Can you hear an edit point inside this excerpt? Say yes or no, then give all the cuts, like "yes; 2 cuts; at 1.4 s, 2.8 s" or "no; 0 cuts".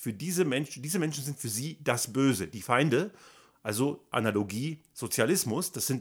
no; 0 cuts